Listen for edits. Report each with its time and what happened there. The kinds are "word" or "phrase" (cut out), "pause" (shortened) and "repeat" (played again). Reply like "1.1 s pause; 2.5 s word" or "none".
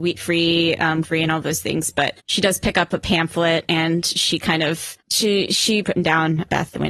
1.0 s word; 2.2 s pause; 5.0 s pause; 5.8 s phrase